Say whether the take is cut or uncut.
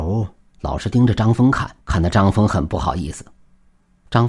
cut